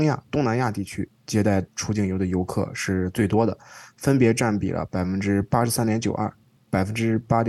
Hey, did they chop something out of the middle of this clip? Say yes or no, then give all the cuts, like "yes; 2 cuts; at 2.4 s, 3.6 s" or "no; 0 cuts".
yes; 1 cut; at 6.6 s